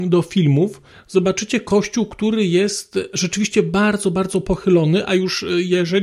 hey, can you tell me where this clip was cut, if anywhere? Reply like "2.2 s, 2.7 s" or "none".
0.9 s

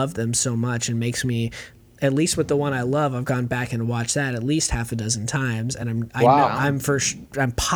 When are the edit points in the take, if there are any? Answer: none

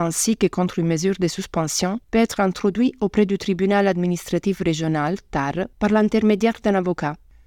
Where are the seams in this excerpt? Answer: 2.0 s, 5.7 s

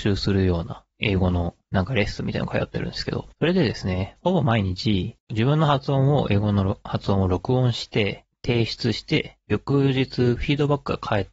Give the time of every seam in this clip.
0.9 s, 1.6 s, 3.3 s, 5.2 s

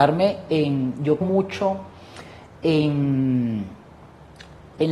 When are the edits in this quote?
1.2 s

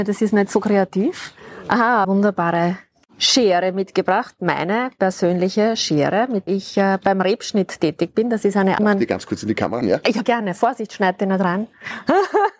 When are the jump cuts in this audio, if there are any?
2.0 s, 3.0 s, 6.5 s, 8.8 s, 9.8 s, 10.2 s

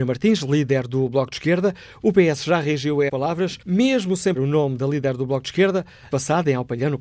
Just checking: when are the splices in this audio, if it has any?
3.1 s, 3.6 s, 4.3 s, 6.1 s

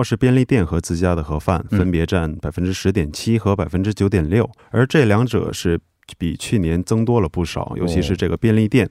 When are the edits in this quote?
4.6 s

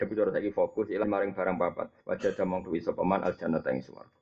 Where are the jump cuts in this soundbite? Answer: 1.0 s, 2.0 s, 2.6 s

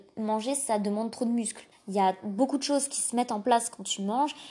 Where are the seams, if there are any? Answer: 1.7 s

